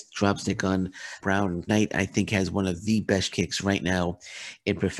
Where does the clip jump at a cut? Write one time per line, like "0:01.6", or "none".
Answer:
0:01.2
0:01.7
0:03.3